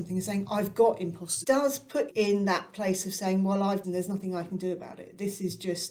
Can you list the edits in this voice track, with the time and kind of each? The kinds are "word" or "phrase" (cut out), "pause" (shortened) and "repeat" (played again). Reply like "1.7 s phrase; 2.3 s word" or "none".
1.4 s word; 2.1 s word; 3.8 s phrase